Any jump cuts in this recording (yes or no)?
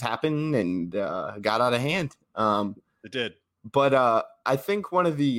no